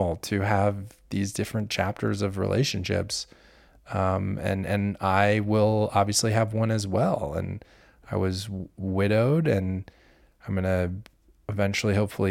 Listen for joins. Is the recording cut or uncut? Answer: uncut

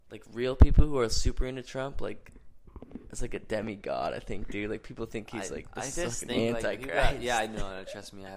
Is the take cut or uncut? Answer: uncut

